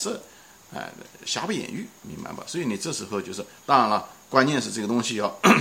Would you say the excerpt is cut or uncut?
cut